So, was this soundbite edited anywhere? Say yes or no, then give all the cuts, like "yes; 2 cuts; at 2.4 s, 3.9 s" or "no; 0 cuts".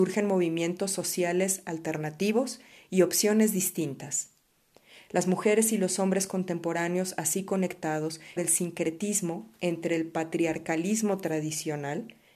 yes; 1 cut; at 8.4 s